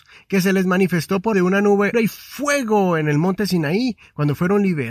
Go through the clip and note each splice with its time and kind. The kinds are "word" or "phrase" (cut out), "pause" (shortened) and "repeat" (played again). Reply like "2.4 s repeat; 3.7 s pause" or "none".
1.3 s word; 1.9 s word

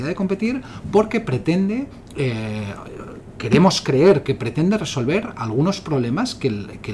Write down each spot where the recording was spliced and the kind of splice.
none

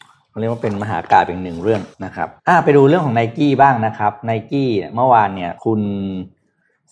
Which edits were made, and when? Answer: 1.9 s pause; 2.4 s pause; 5.6 s pause

